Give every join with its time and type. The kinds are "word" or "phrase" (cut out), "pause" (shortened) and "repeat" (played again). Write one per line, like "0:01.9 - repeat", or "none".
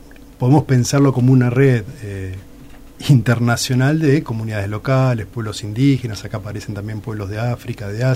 none